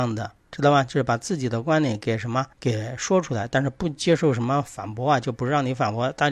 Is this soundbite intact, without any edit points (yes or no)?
no